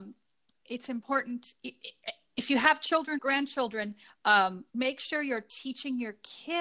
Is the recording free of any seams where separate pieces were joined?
no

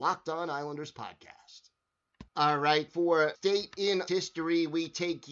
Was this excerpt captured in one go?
no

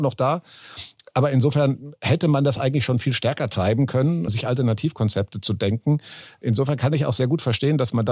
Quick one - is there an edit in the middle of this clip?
no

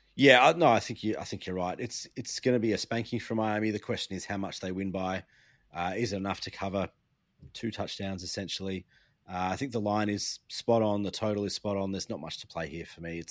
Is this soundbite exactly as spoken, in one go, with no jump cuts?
yes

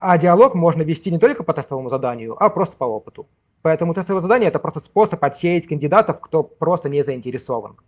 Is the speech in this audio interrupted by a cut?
no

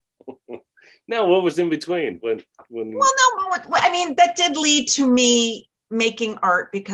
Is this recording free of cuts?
yes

